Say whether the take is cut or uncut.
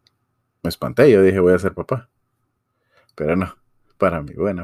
uncut